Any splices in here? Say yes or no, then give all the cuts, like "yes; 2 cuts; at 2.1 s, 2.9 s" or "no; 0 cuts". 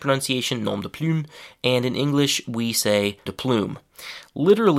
yes; 1 cut; at 3.3 s